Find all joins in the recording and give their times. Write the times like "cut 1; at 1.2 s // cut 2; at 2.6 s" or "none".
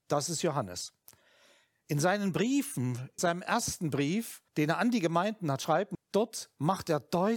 cut 1; at 3.2 s // cut 2; at 4.5 s // cut 3; at 5.9 s